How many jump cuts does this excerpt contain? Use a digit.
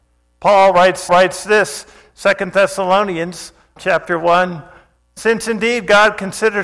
2